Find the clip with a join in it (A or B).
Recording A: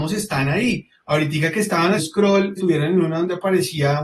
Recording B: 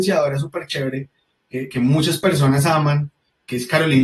A